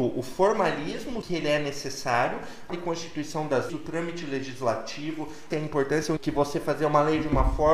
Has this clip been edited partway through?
yes; 5 cuts; at 1.2 s, 2.7 s, 3.7 s, 5.5 s, 6.2 s

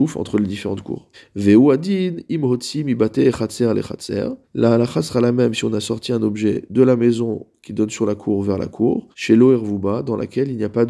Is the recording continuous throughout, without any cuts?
no; 3 cuts; at 1.1 s, 4.4 s, 9.1 s

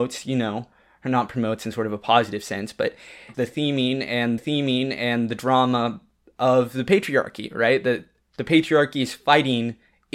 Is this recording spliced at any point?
yes; 2 cuts; at 3.3 s, 4.4 s

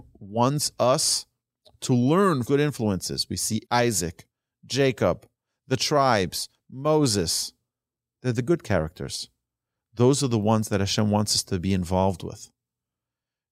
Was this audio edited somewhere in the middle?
yes; 2 cuts; at 2.4 s, 3.6 s

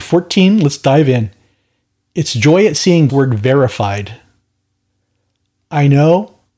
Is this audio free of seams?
no; 1 cut; at 3.1 s

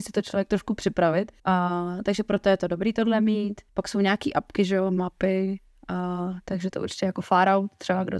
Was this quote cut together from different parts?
yes; 2 cuts; at 1.4 s, 3.7 s

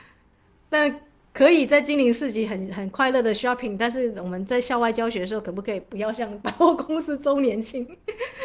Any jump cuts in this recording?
no; 0 cuts

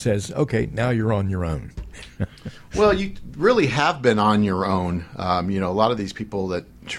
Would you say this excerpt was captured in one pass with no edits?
yes; 0 cuts

